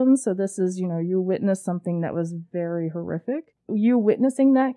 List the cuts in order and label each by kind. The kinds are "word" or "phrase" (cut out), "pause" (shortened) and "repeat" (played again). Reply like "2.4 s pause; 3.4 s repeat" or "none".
none